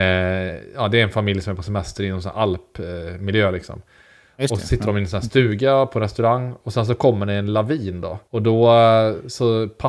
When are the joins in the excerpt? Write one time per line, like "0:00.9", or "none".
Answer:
0:08.3